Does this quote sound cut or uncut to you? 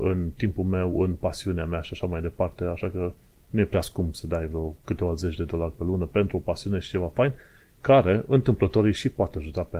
uncut